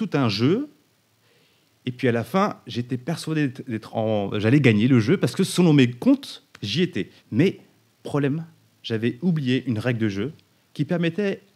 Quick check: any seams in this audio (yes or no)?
yes